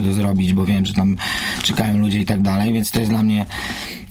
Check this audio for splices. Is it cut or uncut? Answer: uncut